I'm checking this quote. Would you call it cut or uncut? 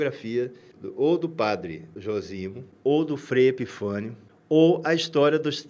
uncut